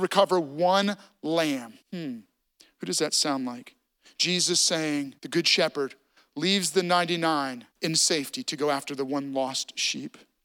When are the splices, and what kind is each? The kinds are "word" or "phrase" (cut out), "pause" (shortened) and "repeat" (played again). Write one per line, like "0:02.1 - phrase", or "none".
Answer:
0:01.8 - pause
0:05.2 - pause
0:07.7 - pause